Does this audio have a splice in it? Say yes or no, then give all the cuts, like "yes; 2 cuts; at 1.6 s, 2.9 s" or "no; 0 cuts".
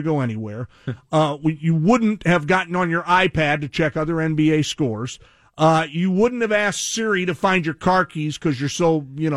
no; 0 cuts